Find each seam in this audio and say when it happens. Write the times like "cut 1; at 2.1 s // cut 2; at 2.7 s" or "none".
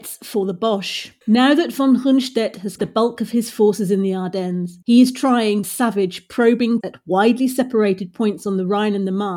cut 1; at 1.2 s // cut 2; at 2.8 s // cut 3; at 4.8 s // cut 4; at 5.6 s // cut 5; at 6.8 s